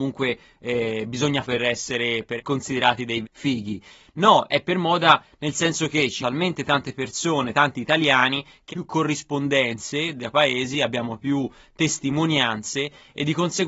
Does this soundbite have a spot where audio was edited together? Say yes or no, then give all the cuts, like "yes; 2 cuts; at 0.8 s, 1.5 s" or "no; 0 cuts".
yes; 8 cuts; at 1.4 s, 2.4 s, 3.2 s, 4.5 s, 6.2 s, 7.5 s, 8.7 s, 10.3 s